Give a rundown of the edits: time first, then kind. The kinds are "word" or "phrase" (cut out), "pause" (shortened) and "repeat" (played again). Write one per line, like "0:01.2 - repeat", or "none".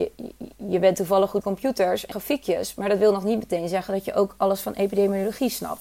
0:01.4 - word
0:02.1 - phrase